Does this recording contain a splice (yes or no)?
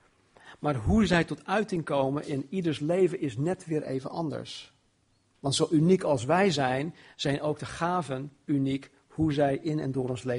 no